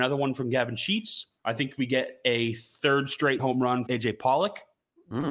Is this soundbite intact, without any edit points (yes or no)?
no